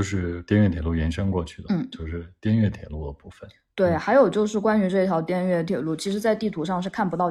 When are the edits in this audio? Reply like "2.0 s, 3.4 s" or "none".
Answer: none